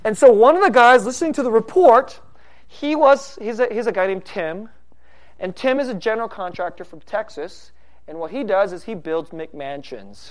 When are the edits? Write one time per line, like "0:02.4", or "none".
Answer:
none